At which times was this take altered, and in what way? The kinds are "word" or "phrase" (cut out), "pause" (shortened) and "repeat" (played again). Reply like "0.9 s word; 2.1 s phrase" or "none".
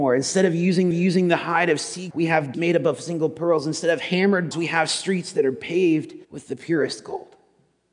0.9 s repeat; 2.1 s word; 2.5 s word; 4.5 s phrase; 6.2 s pause